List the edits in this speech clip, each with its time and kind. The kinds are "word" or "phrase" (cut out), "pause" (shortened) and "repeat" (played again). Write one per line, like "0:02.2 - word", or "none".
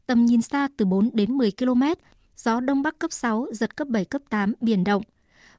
none